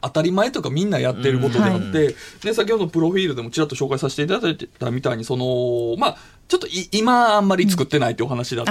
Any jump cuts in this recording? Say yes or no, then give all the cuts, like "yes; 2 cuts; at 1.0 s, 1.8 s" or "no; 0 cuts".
no; 0 cuts